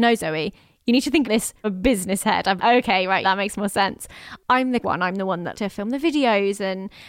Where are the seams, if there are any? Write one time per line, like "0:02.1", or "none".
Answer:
0:01.2
0:01.6
0:02.6
0:03.2
0:04.8
0:05.5

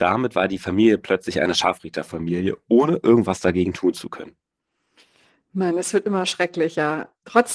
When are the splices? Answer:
none

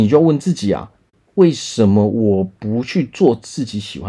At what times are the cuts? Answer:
none

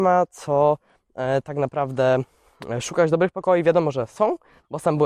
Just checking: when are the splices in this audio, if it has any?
none

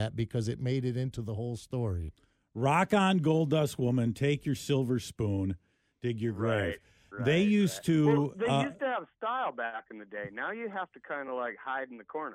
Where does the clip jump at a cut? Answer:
none

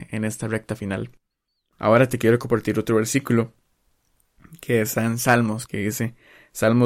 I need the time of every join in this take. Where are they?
0:05.0
0:05.7

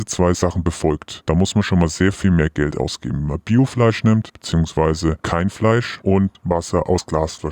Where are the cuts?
none

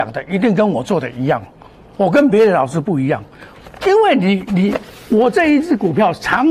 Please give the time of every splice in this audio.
none

